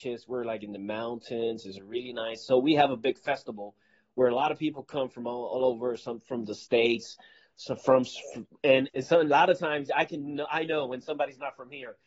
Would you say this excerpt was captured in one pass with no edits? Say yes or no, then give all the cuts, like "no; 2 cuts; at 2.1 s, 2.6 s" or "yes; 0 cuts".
no; 1 cut; at 8.9 s